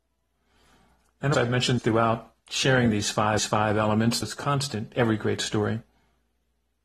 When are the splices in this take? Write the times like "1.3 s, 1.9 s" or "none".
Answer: 1.3 s, 1.8 s, 2.4 s, 3.4 s, 4.2 s, 4.9 s